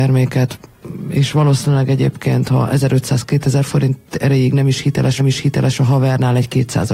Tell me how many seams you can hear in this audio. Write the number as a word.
one